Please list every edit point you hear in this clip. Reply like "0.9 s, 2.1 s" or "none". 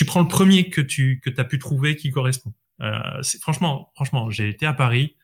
none

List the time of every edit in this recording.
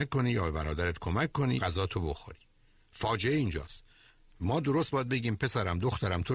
1.6 s, 4.9 s

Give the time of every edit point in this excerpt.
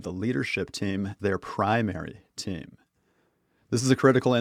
1.2 s

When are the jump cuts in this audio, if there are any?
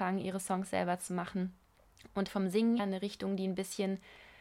2.3 s, 2.8 s

